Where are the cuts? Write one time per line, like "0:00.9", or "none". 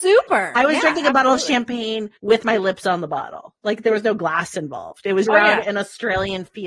0:02.2
0:05.2